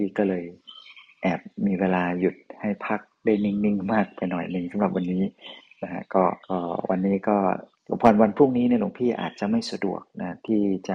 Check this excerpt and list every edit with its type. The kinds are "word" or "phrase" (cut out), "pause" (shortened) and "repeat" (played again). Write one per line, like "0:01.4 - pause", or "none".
0:06.4 - pause
0:07.7 - pause